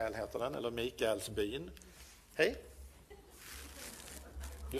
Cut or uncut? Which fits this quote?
uncut